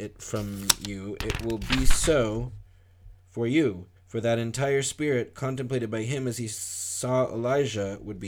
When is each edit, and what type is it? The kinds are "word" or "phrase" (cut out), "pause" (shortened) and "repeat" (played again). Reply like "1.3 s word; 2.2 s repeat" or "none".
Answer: 3.2 s pause; 4.0 s pause